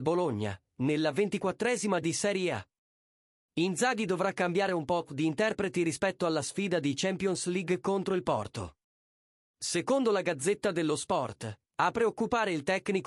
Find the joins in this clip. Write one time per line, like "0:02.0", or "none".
0:02.0